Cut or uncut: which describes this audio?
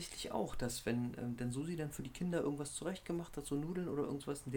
uncut